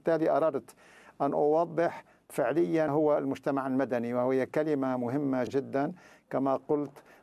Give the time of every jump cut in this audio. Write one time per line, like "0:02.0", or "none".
0:02.9
0:05.5